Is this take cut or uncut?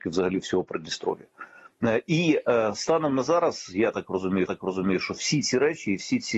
cut